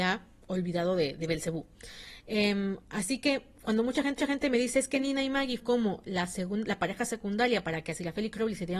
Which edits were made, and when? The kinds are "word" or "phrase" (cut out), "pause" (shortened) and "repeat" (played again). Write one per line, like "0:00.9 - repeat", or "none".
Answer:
0:01.2 - word
0:04.2 - repeat
0:05.6 - word